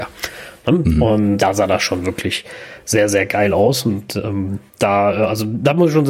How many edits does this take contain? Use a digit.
2